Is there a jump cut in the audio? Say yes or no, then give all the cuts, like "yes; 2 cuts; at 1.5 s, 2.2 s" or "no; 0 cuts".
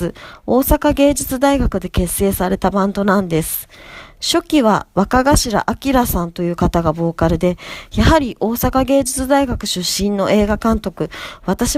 no; 0 cuts